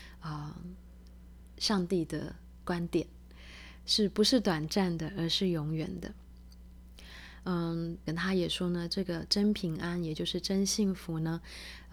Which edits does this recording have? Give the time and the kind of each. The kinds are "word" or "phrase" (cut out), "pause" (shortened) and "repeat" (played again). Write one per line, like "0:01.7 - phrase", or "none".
0:08.1 - word